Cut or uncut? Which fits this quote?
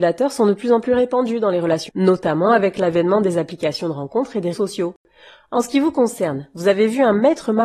cut